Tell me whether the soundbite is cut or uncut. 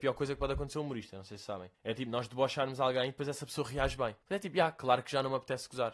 cut